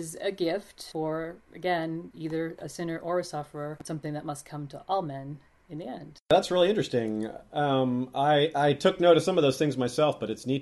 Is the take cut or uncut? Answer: uncut